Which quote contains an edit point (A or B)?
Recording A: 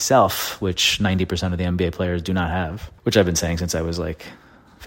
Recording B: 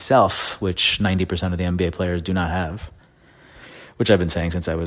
A